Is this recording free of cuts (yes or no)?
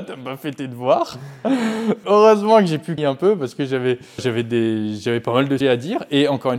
no